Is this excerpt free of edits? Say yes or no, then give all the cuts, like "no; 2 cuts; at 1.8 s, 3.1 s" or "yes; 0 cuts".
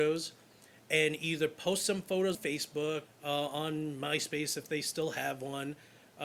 no; 2 cuts; at 2.3 s, 3.1 s